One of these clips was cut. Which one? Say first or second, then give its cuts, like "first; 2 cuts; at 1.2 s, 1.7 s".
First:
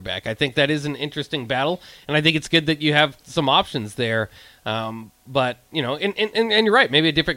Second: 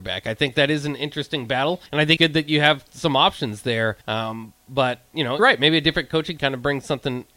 second; 5 cuts; at 1.9 s, 2.2 s, 4.0 s, 5.4 s, 6.4 s